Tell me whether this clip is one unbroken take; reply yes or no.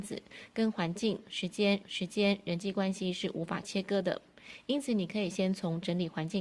no